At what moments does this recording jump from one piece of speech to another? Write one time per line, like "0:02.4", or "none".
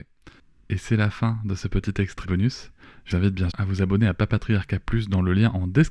0:02.2
0:03.1
0:03.5